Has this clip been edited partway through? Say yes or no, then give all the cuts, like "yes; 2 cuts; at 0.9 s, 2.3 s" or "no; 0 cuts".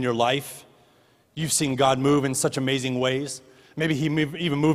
no; 0 cuts